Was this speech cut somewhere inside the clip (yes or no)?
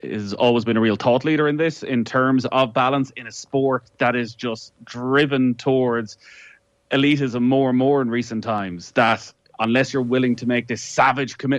no